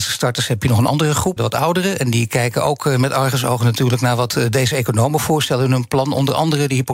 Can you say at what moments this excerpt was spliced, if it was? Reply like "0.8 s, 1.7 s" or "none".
1.4 s